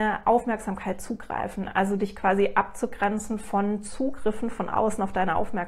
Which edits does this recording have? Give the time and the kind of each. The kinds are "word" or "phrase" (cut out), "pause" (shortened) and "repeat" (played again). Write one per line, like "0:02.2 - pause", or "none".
none

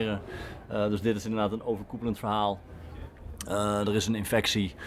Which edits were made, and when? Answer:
none

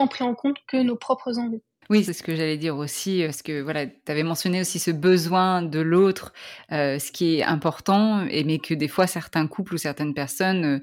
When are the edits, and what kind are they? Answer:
0:02.1 - phrase
0:03.2 - word

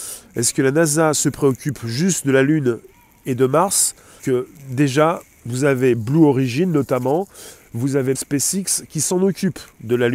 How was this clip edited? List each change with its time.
0:04.2 - word
0:08.2 - word

